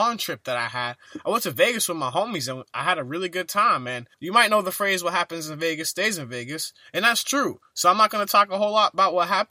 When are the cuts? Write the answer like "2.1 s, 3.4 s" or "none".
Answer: 4.1 s